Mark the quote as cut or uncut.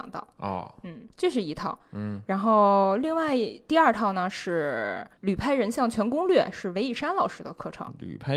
cut